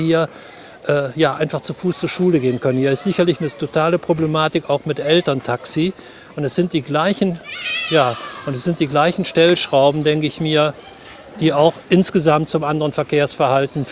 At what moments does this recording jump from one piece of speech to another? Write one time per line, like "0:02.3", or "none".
none